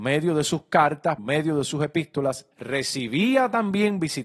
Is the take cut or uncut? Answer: cut